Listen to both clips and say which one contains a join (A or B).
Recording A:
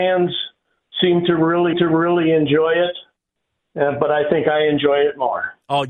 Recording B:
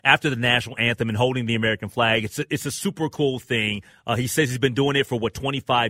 A